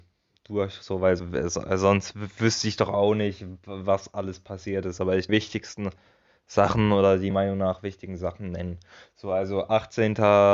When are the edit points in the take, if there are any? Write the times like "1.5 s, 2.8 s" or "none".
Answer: 1.2 s, 5.3 s, 7.3 s

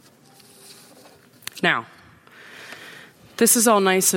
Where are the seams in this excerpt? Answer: none

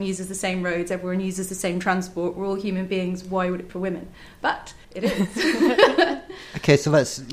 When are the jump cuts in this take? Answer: 3.7 s, 4.8 s

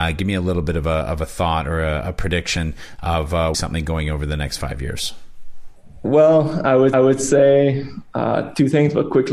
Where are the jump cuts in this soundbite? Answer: 3.5 s, 6.9 s

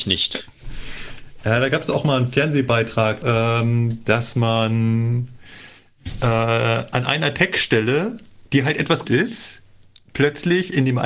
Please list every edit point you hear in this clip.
3.2 s, 8.4 s, 9.0 s

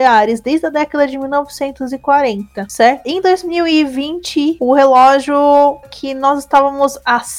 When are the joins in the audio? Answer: 5.8 s

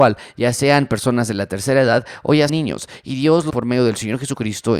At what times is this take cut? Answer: 2.5 s, 3.5 s

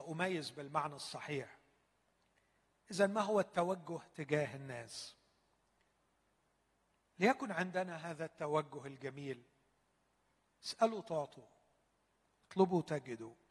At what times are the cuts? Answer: none

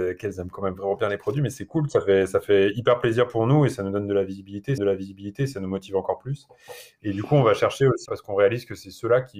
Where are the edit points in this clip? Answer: 4.8 s, 8.1 s

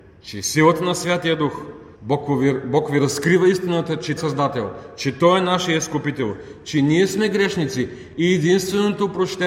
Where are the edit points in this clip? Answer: 1.9 s, 4.2 s

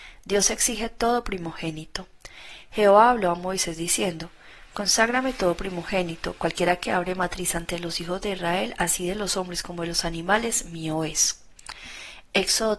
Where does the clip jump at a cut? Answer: none

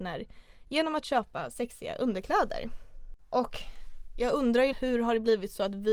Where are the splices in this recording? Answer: 4.7 s

